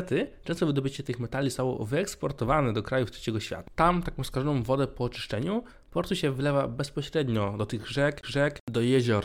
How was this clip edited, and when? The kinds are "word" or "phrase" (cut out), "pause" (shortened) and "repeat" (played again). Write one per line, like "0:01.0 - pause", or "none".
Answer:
0:08.2 - repeat

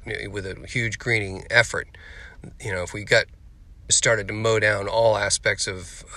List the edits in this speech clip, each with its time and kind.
0:03.9 - word

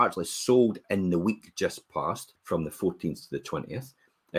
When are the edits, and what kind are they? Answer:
0:02.4 - pause

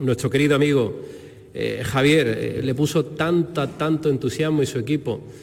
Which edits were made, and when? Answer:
none

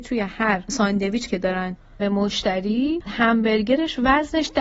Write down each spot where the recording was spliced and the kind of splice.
0:01.3 - word
0:02.0 - word
0:03.1 - word

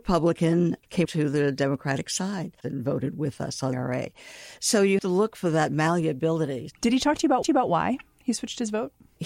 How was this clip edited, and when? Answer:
0:01.0 - word
0:02.6 - pause
0:03.7 - word
0:05.0 - word
0:07.4 - repeat

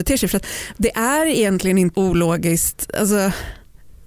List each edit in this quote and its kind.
0:01.9 - word

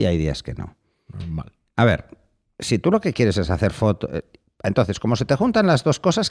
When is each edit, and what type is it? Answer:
none

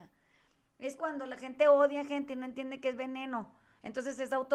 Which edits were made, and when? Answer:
0:01.0 - word

